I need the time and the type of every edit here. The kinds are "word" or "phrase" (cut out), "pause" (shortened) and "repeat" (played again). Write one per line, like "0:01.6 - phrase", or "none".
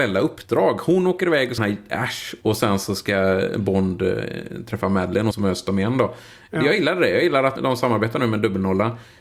0:01.6 - phrase
0:05.3 - phrase
0:07.6 - word